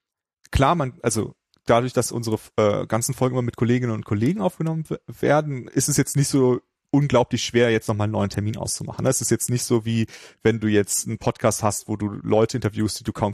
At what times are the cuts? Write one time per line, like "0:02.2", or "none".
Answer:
none